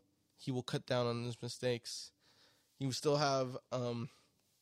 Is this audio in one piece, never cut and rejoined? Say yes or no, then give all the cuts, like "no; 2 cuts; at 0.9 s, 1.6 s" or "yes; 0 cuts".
yes; 0 cuts